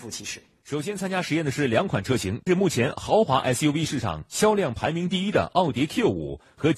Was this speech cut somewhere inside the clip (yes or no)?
no